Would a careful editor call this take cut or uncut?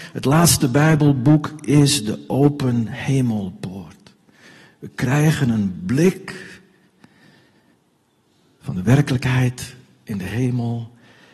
uncut